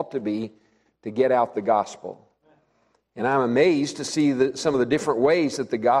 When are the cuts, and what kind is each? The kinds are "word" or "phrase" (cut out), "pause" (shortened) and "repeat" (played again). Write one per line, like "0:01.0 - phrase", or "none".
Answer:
none